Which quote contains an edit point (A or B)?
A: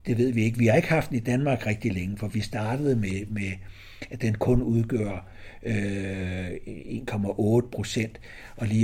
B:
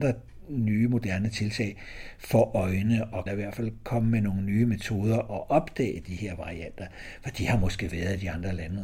B